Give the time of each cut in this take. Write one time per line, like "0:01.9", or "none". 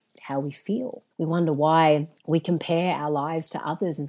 0:01.1
0:02.2